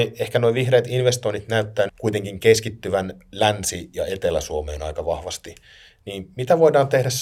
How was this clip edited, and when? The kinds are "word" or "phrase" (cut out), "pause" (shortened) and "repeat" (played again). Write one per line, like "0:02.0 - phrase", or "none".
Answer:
0:01.9 - word